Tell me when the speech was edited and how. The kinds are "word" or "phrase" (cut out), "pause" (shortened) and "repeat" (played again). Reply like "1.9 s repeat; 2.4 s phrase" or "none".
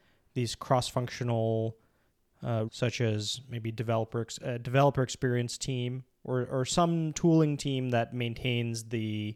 2.7 s word

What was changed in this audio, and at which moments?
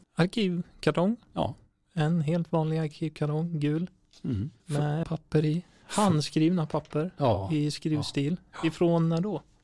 4.6 s pause; 5.0 s word

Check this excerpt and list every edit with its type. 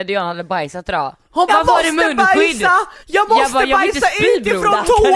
1.5 s phrase; 3.0 s pause

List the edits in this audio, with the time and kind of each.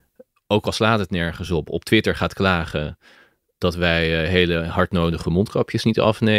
none

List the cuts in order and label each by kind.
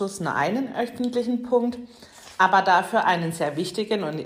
none

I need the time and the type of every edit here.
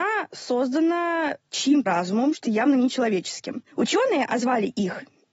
1.8 s word; 2.4 s word; 3.7 s pause

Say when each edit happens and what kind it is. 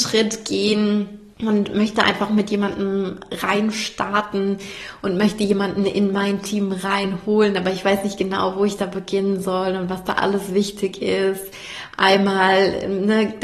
1.3 s pause

